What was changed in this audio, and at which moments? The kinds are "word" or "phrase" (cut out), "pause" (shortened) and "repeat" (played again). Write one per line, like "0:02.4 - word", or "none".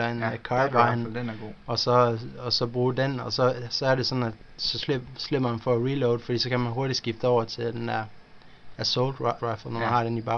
0:09.4 - word

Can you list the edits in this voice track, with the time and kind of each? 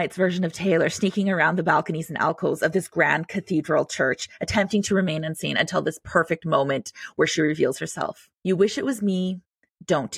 0:08.4 - pause

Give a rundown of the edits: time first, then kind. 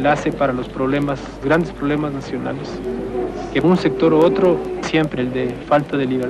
0:01.4 - word
0:03.6 - word
0:04.8 - word
0:05.2 - word

